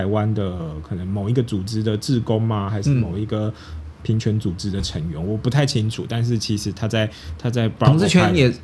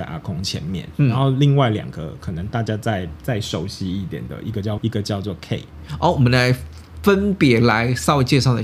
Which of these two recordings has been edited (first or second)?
second